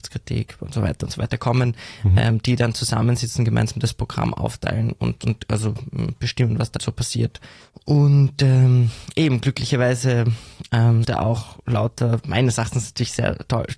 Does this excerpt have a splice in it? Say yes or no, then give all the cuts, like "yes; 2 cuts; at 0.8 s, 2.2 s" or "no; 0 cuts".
yes; 4 cuts; at 6.8 s, 7.6 s, 11.0 s, 12.2 s